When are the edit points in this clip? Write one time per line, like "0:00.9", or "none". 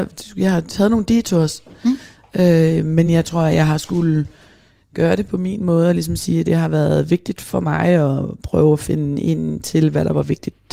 none